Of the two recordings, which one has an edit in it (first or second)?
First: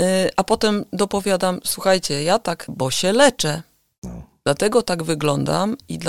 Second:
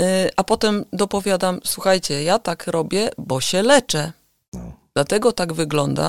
first